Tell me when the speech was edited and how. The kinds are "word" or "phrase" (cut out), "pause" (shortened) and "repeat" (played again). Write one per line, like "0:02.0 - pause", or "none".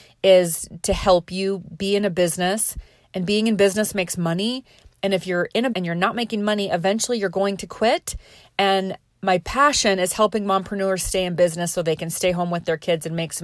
0:05.7 - word